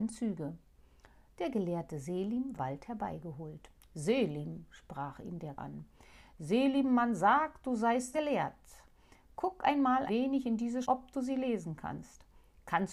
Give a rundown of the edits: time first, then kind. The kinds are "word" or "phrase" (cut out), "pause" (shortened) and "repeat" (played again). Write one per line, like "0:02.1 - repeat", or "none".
0:02.5 - word
0:05.5 - word
0:08.1 - word
0:10.1 - word
0:10.8 - word